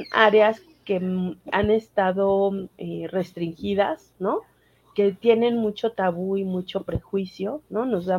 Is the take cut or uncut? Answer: uncut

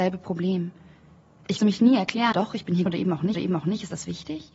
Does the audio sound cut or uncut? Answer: cut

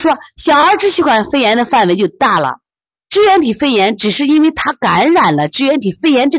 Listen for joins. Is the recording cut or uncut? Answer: uncut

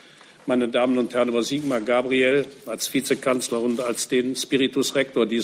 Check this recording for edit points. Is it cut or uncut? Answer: uncut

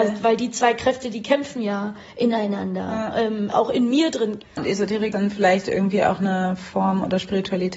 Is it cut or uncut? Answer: cut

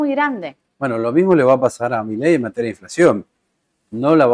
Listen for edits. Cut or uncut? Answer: uncut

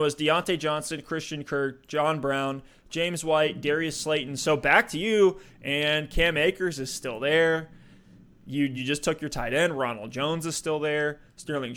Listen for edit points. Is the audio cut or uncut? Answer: uncut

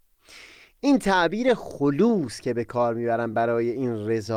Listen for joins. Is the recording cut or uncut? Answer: uncut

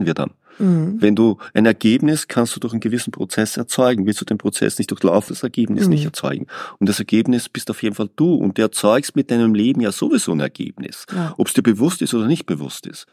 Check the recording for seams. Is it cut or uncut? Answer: cut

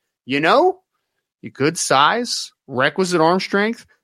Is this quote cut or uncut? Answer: cut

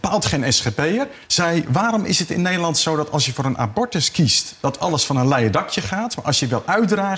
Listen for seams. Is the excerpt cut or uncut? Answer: cut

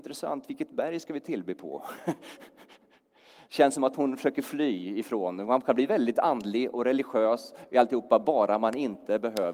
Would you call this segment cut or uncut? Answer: uncut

